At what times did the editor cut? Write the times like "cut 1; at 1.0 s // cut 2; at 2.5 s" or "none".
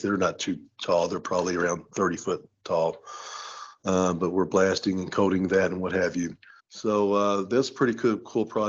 cut 1; at 6.6 s